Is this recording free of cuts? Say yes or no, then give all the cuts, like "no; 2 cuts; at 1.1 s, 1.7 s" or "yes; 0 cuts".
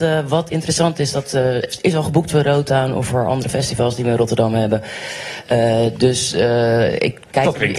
yes; 0 cuts